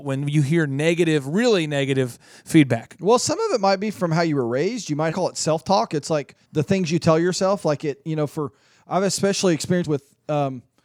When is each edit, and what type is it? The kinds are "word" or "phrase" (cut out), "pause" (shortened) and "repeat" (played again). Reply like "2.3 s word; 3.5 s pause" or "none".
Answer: 5.1 s phrase; 6.4 s pause; 9.8 s word